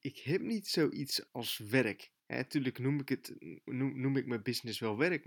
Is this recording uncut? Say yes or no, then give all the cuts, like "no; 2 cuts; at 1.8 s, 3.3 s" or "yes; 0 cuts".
no; 3 cuts; at 1.3 s, 2.2 s, 3.7 s